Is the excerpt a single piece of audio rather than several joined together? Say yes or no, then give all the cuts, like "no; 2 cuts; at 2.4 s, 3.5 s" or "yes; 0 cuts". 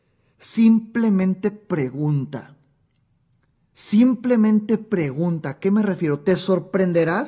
yes; 0 cuts